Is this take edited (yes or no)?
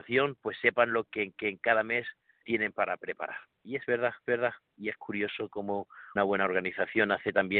yes